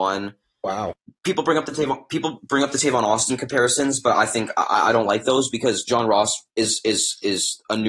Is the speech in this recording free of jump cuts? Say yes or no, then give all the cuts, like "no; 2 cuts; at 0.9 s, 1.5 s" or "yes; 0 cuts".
no; 1 cut; at 6.5 s